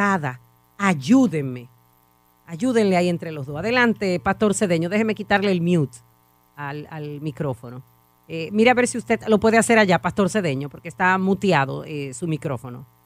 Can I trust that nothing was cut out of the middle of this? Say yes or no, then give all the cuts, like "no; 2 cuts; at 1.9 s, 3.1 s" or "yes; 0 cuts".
yes; 0 cuts